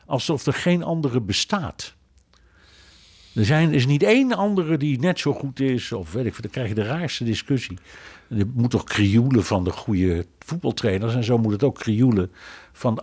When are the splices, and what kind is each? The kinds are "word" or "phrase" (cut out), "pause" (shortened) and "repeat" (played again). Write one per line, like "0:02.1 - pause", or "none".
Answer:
none